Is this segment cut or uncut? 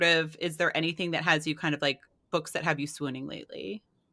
uncut